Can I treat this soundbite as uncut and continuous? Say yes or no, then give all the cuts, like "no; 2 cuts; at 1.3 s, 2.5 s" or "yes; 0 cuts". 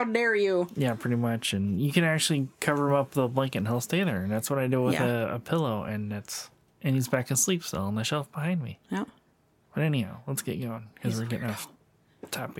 yes; 0 cuts